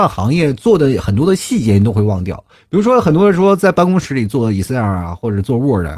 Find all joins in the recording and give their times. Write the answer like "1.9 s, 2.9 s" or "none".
none

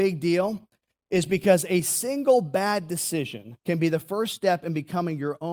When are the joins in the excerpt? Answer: 3.6 s

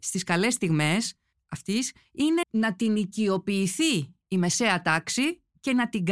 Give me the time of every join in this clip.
2.4 s

